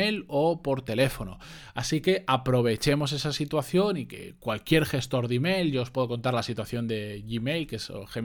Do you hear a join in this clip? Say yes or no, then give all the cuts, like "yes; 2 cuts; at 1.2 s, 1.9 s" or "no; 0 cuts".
no; 0 cuts